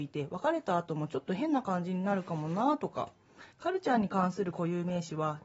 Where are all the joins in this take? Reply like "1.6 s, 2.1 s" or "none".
3.5 s

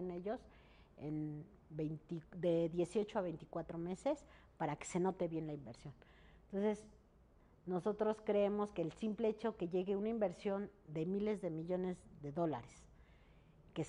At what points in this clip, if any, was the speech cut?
none

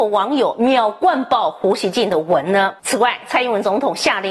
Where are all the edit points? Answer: 2.8 s

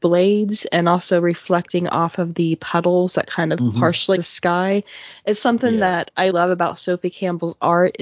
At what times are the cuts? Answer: 4.2 s, 6.3 s

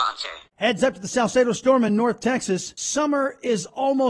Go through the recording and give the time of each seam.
none

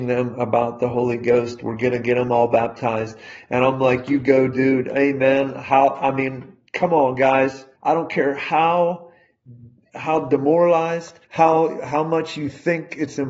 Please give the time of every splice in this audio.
7.8 s, 11.2 s

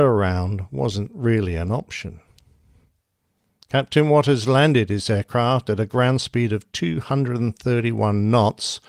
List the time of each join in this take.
none

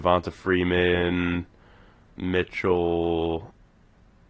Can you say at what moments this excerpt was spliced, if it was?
2.1 s

